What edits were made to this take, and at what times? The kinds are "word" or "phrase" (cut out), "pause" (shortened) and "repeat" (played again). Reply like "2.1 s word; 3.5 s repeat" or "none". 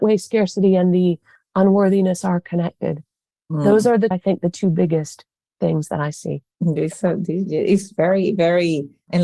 4.1 s word; 6.5 s pause